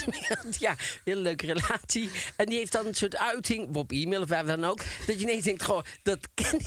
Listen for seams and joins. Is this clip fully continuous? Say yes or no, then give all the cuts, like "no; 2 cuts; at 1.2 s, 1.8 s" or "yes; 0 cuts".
yes; 0 cuts